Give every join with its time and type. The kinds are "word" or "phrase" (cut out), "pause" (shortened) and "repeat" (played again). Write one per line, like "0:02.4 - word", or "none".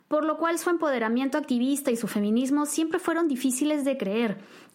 none